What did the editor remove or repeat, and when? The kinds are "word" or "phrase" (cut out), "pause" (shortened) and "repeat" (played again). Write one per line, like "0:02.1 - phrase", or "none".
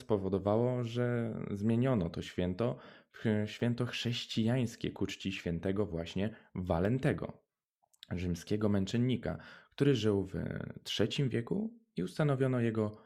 none